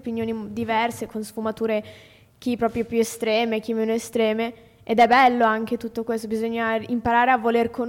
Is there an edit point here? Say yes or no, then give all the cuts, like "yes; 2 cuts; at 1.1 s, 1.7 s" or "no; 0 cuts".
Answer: no; 0 cuts